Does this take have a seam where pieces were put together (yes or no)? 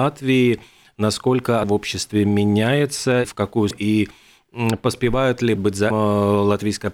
yes